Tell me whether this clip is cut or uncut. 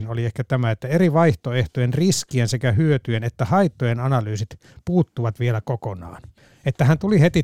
uncut